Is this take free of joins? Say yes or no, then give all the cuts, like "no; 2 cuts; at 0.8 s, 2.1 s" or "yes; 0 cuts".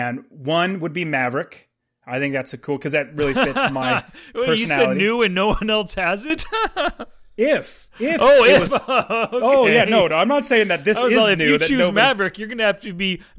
yes; 0 cuts